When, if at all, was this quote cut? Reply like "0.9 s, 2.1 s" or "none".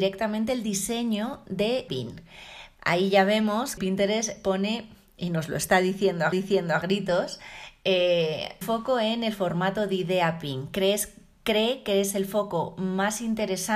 1.9 s, 3.8 s, 6.3 s, 8.6 s